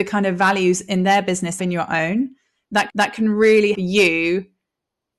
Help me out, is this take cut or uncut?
cut